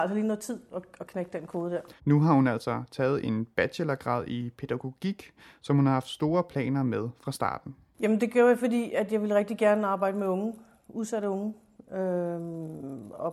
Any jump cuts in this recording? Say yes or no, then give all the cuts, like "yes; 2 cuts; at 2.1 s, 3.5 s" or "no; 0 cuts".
yes; 1 cut; at 2.0 s